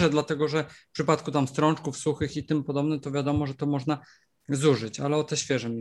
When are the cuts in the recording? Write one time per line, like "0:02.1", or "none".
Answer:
none